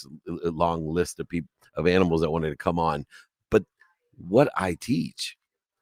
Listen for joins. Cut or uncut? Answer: uncut